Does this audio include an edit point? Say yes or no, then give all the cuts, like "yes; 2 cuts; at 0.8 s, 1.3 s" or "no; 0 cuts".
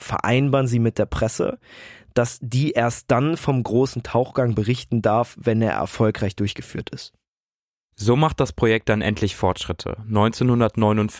no; 0 cuts